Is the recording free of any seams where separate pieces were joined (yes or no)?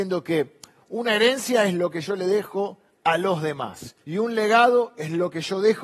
no